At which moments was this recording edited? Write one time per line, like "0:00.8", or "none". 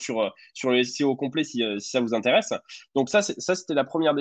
none